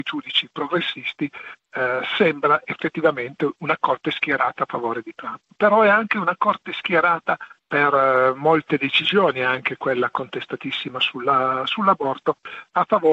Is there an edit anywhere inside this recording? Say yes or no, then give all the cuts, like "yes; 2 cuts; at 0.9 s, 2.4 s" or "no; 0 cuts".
no; 0 cuts